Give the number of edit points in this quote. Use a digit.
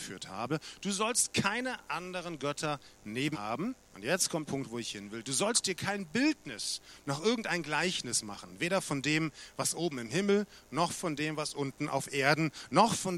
3